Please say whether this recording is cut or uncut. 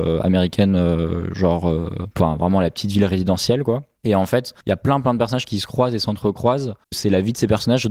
cut